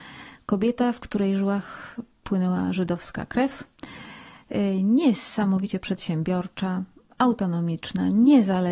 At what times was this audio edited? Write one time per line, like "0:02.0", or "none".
none